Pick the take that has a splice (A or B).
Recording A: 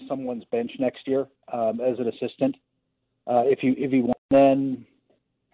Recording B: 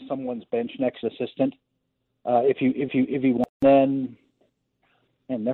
B